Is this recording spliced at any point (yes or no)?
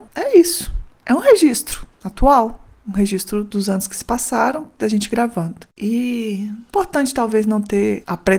no